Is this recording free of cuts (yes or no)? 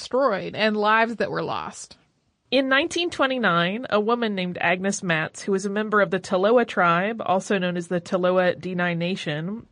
yes